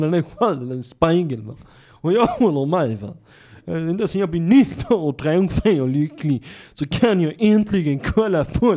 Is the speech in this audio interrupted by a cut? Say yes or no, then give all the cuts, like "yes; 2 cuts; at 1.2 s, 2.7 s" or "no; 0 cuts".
no; 0 cuts